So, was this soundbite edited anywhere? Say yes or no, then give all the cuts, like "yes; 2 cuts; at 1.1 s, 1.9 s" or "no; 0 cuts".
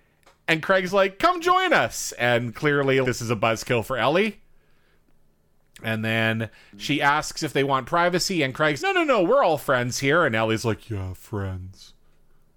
yes; 2 cuts; at 3.0 s, 8.8 s